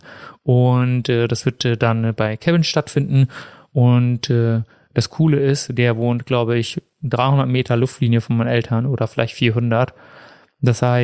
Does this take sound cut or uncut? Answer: uncut